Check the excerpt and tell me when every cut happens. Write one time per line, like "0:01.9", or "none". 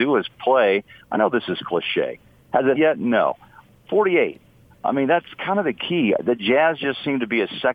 0:02.8